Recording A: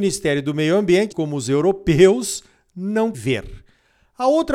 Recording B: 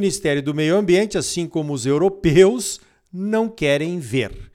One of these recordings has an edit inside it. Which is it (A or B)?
A